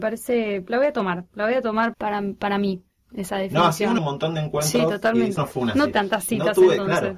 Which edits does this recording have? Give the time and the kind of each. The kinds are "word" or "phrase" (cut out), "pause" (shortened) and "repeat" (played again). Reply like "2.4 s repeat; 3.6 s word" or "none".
1.9 s word; 4.0 s word; 5.4 s word; 5.9 s word

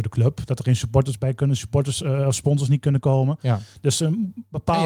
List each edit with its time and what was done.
none

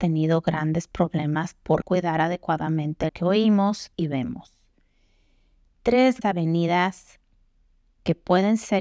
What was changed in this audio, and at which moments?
1.8 s word; 3.1 s word; 3.9 s word; 6.2 s word

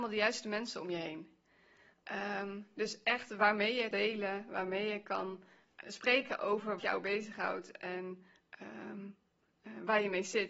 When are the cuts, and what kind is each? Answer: 3.9 s word; 5.8 s word; 6.8 s word

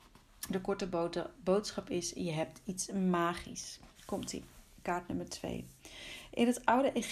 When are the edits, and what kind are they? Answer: 3.9 s pause

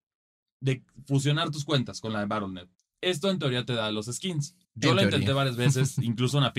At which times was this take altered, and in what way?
2.7 s pause; 4.6 s pause

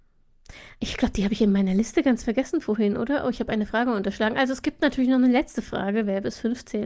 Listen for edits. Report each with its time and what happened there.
none

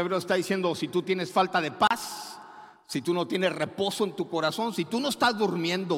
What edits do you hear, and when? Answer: none

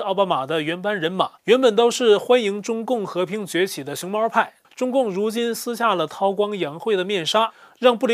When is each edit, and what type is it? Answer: 1.4 s pause; 4.6 s phrase

